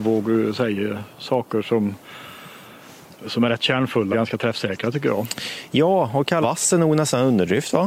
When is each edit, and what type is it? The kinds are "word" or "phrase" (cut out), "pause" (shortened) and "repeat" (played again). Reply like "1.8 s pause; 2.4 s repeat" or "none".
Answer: 4.1 s word; 6.4 s word